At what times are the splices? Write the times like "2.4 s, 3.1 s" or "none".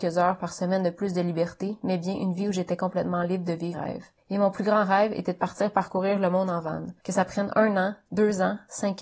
3.7 s, 4.2 s, 7.0 s